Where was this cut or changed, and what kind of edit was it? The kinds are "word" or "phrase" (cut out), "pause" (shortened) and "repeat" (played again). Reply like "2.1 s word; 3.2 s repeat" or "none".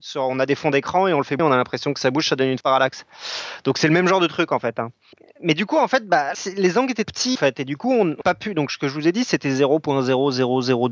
1.4 s word; 2.6 s word; 6.3 s word; 7.0 s word; 7.3 s word; 8.2 s word